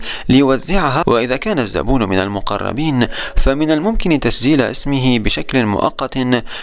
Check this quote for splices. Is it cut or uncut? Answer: cut